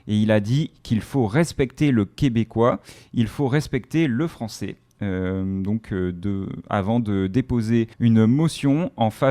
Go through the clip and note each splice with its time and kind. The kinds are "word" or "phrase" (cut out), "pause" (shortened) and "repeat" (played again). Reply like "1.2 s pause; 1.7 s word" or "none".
7.9 s pause

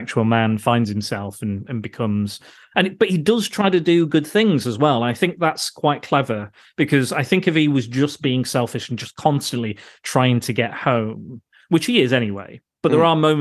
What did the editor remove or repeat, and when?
none

